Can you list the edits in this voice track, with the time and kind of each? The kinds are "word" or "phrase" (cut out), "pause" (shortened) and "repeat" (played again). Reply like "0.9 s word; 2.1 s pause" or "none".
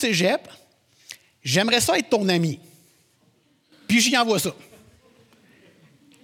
none